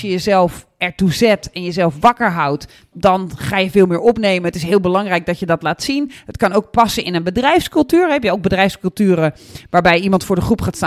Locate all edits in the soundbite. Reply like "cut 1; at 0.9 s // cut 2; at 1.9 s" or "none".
none